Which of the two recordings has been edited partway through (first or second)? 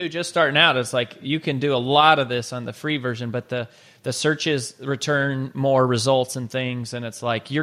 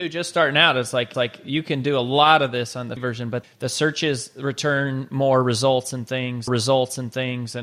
second